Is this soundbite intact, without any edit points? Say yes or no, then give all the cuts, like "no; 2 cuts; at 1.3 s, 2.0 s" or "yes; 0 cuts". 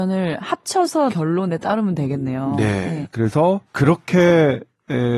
no; 2 cuts; at 1.1 s, 3.7 s